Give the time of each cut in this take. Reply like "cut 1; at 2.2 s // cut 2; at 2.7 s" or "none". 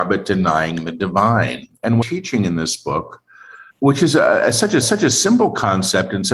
cut 1; at 2.0 s // cut 2; at 3.7 s // cut 3; at 4.8 s